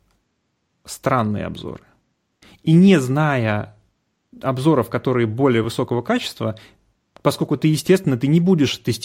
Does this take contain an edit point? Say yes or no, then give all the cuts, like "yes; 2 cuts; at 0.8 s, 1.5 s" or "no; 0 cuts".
no; 0 cuts